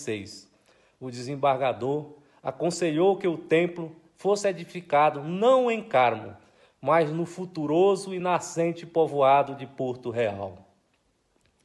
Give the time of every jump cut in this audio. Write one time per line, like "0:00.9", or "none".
none